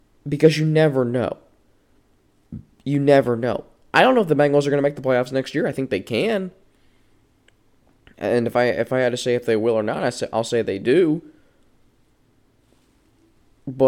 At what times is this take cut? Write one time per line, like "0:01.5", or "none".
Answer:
none